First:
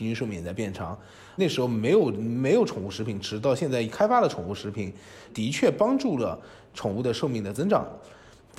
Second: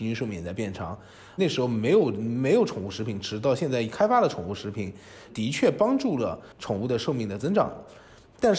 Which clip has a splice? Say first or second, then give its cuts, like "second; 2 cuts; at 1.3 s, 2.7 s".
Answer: second; 1 cut; at 6.5 s